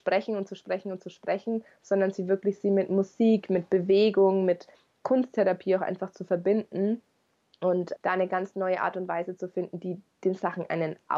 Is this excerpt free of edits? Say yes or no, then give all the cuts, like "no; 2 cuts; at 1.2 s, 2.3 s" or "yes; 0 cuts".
no; 1 cut; at 8.0 s